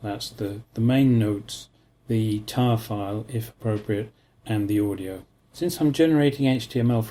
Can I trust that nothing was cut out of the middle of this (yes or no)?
yes